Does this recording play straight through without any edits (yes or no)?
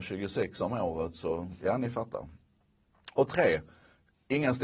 yes